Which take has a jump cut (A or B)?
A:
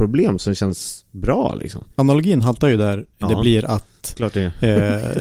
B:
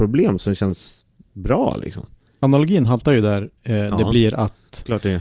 A